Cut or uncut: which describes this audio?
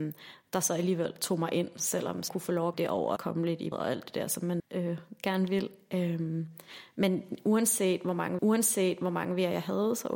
cut